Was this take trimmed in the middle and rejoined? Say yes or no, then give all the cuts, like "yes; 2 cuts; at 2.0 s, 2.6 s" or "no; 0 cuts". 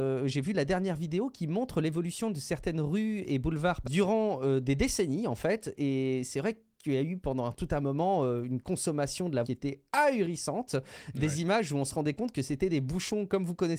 yes; 3 cuts; at 3.8 s, 9.4 s, 9.9 s